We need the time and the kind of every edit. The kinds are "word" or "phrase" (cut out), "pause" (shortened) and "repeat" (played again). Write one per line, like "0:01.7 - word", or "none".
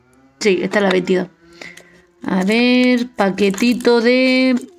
none